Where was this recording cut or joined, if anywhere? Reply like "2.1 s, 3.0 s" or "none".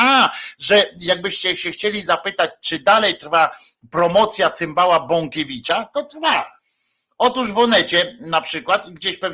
none